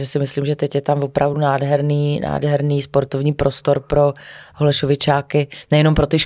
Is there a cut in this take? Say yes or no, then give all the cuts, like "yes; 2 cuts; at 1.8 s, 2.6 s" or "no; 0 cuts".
no; 0 cuts